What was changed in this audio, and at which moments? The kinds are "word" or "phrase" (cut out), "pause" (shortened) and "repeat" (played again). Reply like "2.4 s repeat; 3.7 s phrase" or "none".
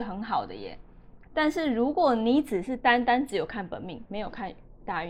1.2 s word